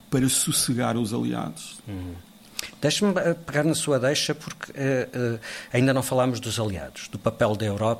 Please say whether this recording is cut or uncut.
uncut